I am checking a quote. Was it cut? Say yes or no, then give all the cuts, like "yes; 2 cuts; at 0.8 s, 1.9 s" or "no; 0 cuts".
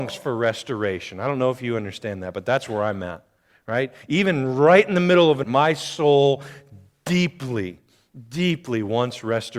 yes; 1 cut; at 5.4 s